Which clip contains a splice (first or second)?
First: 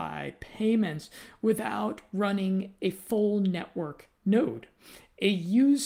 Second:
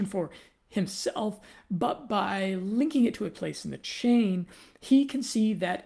first